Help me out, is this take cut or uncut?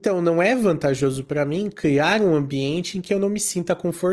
uncut